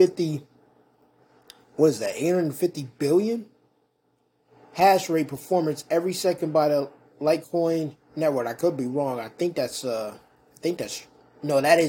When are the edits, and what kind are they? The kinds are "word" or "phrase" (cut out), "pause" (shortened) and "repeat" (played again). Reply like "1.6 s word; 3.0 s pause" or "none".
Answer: none